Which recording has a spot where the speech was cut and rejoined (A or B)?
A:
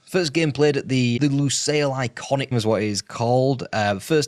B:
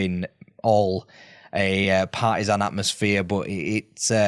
A